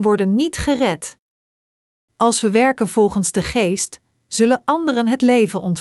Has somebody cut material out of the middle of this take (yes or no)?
no